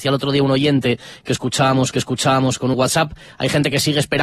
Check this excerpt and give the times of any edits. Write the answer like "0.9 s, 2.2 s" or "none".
1.9 s, 2.7 s

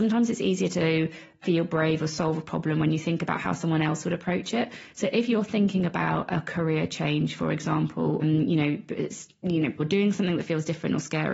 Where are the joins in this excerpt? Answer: 8.2 s, 9.8 s

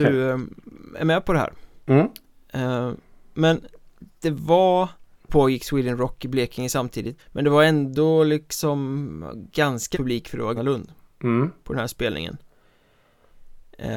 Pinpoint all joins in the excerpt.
5.3 s, 7.2 s, 9.9 s, 10.6 s

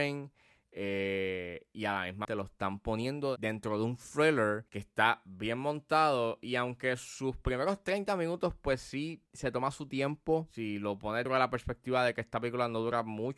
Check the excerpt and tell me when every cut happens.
2.2 s, 4.7 s, 9.3 s, 11.3 s

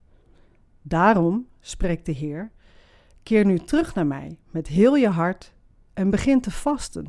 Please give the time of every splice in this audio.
none

